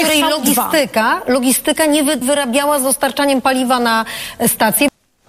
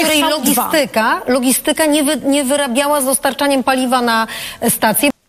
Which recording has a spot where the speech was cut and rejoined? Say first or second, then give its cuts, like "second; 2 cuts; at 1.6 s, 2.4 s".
first; 1 cut; at 2.2 s